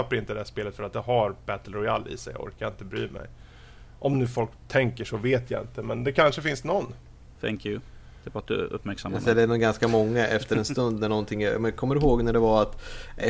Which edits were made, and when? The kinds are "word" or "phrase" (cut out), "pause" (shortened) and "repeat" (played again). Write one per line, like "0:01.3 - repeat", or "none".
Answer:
none